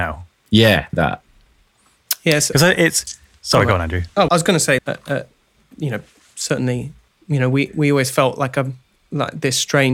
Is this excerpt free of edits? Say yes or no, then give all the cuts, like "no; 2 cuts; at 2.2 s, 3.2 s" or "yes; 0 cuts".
no; 4 cuts; at 0.9 s, 4.3 s, 4.8 s, 7.1 s